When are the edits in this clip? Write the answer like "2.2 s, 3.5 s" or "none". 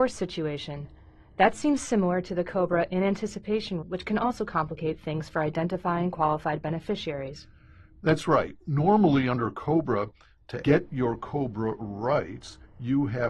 3.8 s, 10.6 s